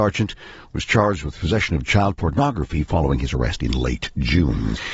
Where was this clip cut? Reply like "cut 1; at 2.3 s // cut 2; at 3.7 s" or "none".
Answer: none